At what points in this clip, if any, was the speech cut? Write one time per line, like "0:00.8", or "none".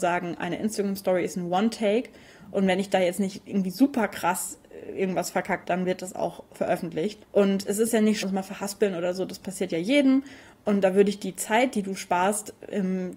0:05.6
0:06.6
0:07.2
0:08.2